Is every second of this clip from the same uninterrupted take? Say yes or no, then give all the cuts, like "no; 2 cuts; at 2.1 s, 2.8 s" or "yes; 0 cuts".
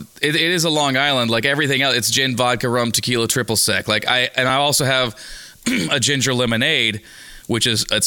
yes; 0 cuts